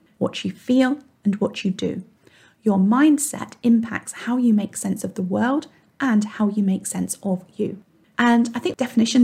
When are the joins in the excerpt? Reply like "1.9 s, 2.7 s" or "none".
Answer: none